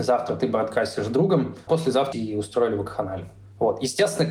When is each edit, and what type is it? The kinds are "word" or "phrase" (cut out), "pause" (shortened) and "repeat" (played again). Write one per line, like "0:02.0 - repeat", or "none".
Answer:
0:01.7 - word
0:02.1 - phrase